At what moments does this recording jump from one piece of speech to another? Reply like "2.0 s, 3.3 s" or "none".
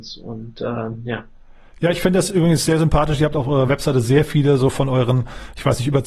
none